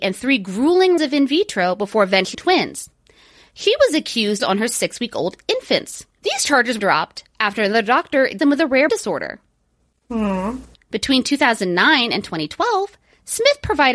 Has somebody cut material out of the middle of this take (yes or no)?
yes